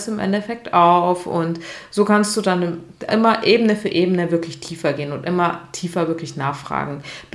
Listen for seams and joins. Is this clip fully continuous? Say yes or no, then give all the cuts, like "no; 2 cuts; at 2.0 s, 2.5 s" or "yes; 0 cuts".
no; 1 cut; at 3.1 s